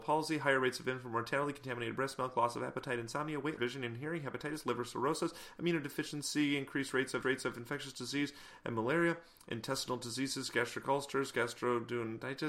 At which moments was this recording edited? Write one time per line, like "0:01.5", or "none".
0:03.6
0:07.2